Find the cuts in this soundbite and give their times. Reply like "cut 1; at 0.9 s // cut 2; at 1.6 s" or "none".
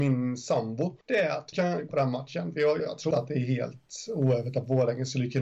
cut 1; at 1.0 s // cut 2; at 1.5 s // cut 3; at 1.9 s // cut 4; at 2.8 s // cut 5; at 3.1 s